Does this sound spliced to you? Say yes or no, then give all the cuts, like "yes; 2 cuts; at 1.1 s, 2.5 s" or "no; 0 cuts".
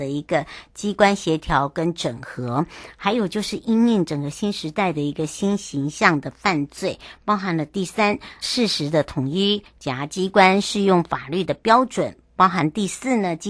yes; 1 cut; at 8.4 s